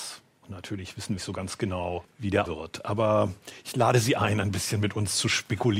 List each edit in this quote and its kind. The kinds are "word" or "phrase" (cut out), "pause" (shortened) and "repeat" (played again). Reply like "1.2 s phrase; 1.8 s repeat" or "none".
1.2 s phrase; 2.4 s word